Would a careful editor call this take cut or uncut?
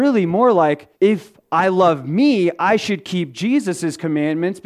cut